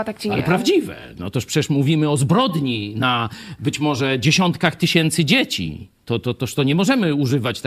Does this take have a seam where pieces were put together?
no; 0 cuts

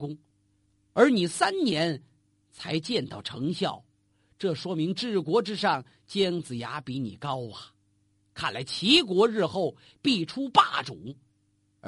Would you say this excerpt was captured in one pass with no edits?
yes; 0 cuts

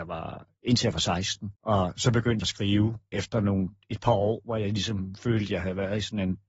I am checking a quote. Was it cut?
yes; 3 cuts; at 1.6 s, 2.4 s, 3.1 s

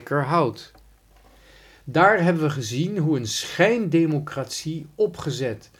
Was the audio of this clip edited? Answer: no; 0 cuts

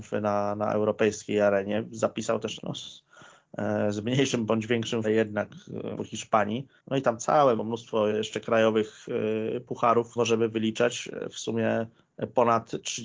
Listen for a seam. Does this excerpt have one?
yes; 7 cuts; at 2.6 s, 5.0 s, 6.0 s, 6.8 s, 7.6 s, 8.1 s, 10.2 s

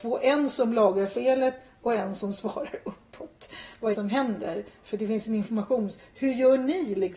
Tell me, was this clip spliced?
yes; 1 cut; at 3.9 s

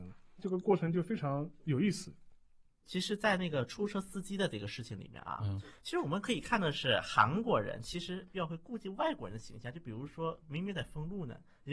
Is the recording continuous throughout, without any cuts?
yes; 0 cuts

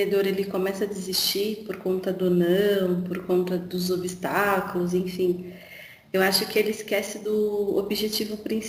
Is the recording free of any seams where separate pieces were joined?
yes; 0 cuts

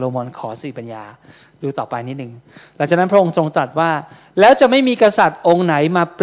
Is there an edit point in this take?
no; 0 cuts

